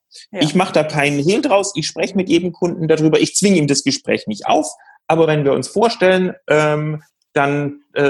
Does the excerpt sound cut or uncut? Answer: uncut